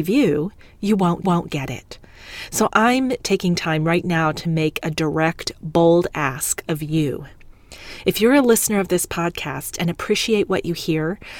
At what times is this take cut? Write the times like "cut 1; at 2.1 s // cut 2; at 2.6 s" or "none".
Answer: cut 1; at 1.2 s

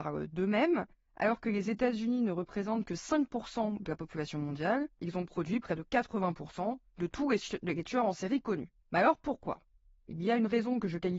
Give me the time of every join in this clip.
cut 1; at 6.9 s // cut 2; at 8.8 s

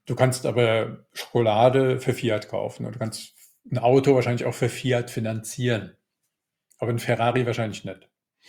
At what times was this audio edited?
none

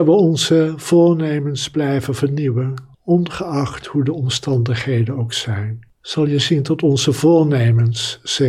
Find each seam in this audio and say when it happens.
cut 1; at 2.9 s // cut 2; at 5.9 s

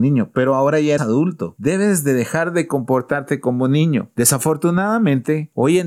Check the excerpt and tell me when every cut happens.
cut 1; at 1.0 s

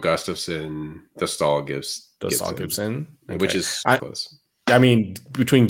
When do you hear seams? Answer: cut 1; at 1.1 s // cut 2; at 4.0 s

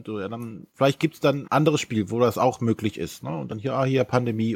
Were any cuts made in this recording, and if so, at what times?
cut 1; at 1.5 s

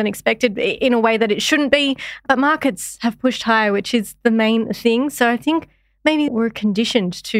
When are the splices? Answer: cut 1; at 6.3 s

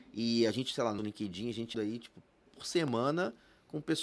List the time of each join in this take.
cut 1; at 1.0 s // cut 2; at 1.7 s

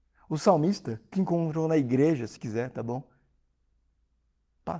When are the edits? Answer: cut 1; at 1.1 s // cut 2; at 2.4 s

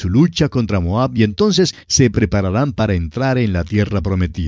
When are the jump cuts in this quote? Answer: none

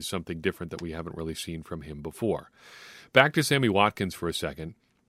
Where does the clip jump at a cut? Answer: none

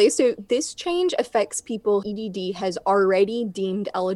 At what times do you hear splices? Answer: cut 1; at 2.0 s

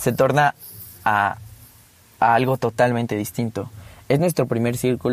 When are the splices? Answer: none

